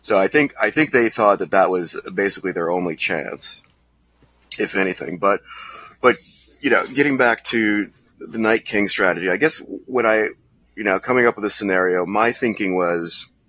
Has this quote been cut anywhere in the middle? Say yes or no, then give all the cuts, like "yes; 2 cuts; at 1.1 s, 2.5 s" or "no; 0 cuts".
no; 0 cuts